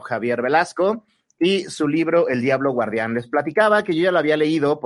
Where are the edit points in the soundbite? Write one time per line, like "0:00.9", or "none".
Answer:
none